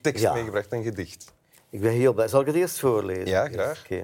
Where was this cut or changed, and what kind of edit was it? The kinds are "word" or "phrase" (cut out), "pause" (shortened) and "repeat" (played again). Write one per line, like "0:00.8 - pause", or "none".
none